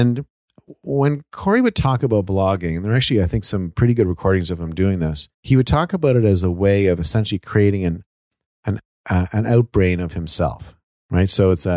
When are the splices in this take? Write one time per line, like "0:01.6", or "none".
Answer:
0:05.3